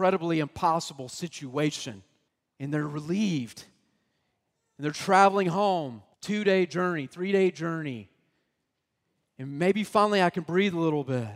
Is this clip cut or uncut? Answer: cut